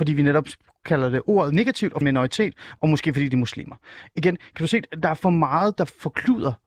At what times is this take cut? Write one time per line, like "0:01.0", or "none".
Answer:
0:02.0